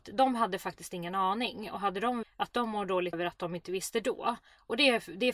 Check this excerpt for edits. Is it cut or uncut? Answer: cut